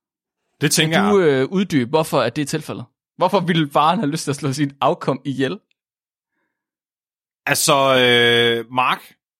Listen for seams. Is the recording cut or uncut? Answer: uncut